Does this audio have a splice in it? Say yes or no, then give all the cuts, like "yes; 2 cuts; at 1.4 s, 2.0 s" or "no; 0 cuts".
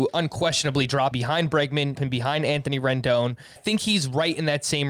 yes; 3 cuts; at 1.1 s, 2.0 s, 3.6 s